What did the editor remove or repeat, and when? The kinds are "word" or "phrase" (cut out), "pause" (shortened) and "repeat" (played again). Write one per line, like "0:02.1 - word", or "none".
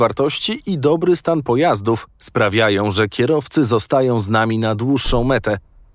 none

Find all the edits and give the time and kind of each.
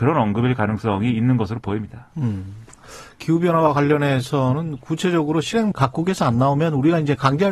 0:05.7 - word

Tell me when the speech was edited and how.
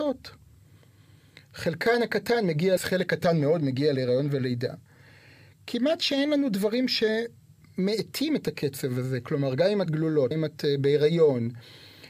0:02.8 - word
0:09.9 - word
0:10.3 - word

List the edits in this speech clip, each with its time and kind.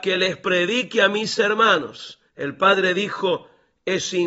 0:02.3 - pause

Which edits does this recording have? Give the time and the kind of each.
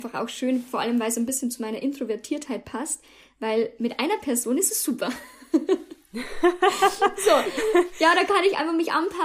none

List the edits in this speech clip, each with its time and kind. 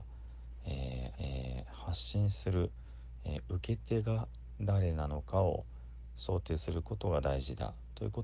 0:01.1 - repeat

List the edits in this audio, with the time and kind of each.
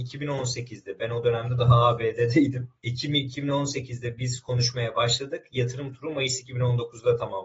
0:02.8 - pause

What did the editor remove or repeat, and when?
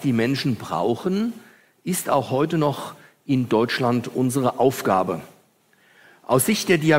none

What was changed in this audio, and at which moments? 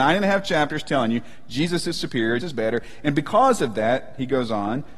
0:02.4 - word

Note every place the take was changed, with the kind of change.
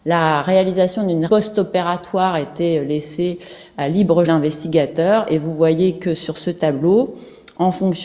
0:01.3 - word
0:04.2 - word

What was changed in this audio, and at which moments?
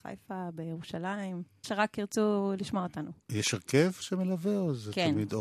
0:01.6 - word

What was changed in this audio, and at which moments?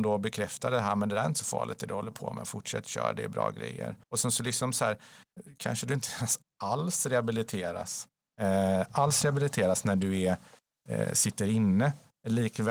0:04.0 - pause

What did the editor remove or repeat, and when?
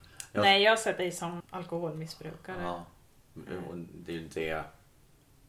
0:01.4 - word

